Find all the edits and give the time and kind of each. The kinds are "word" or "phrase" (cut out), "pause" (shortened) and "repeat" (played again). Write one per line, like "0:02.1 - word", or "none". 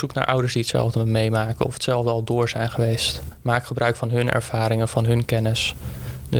none